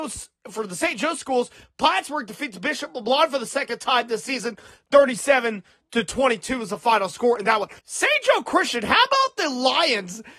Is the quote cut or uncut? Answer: cut